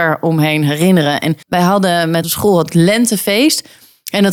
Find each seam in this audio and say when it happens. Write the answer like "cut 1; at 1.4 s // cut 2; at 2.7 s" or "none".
cut 1; at 1.4 s // cut 2; at 2.2 s